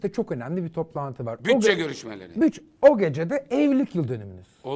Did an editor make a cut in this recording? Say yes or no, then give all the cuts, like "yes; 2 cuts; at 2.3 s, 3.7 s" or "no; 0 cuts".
no; 0 cuts